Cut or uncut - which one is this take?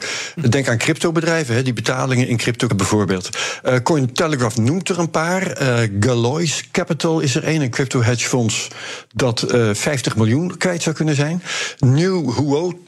cut